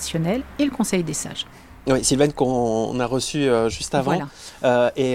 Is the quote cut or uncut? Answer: uncut